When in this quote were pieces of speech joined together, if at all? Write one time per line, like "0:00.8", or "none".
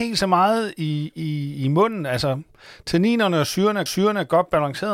0:03.9